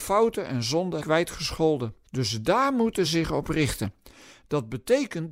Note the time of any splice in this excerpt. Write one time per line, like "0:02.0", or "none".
0:01.0
0:02.1
0:03.0